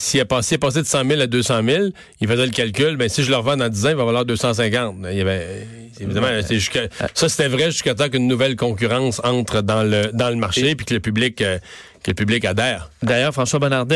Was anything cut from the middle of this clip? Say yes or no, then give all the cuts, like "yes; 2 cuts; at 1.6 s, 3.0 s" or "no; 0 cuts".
no; 0 cuts